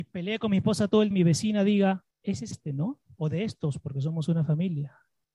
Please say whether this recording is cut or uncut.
cut